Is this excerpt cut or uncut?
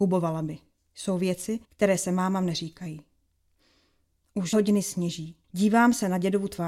cut